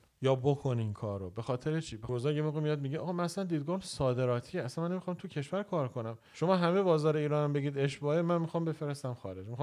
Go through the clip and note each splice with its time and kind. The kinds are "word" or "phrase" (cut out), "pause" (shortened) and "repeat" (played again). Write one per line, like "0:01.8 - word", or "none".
0:02.1 - phrase